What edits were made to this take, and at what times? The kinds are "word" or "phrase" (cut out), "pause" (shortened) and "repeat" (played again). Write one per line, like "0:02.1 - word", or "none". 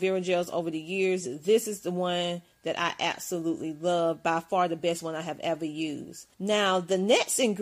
0:06.3 - pause